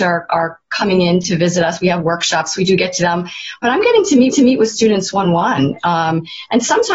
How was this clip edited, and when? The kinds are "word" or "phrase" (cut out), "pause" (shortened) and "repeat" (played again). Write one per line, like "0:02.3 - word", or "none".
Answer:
0:03.0 - word
0:04.3 - repeat
0:05.2 - word